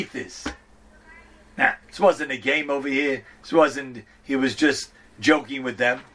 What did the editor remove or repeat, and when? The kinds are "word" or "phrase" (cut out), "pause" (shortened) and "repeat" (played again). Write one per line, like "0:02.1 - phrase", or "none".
0:01.0 - pause
0:01.8 - pause
0:03.3 - pause